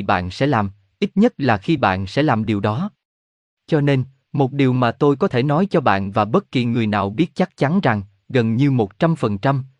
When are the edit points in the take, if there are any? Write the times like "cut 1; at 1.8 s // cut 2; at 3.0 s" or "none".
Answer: none